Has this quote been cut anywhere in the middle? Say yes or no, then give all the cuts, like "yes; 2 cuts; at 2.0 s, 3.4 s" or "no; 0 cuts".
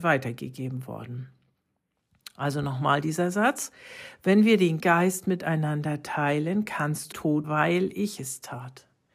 yes; 3 cuts; at 4.8 s, 7.1 s, 7.4 s